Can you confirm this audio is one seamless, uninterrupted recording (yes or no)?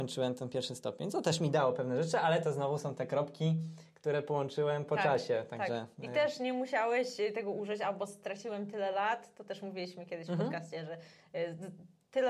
yes